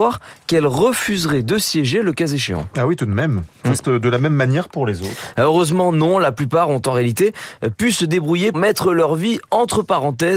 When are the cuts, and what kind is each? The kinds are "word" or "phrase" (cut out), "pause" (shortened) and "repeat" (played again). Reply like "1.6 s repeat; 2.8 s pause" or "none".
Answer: 3.8 s word; 8.5 s word